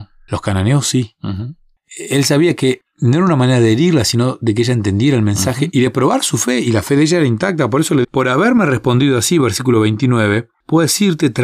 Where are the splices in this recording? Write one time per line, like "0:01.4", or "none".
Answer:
0:08.0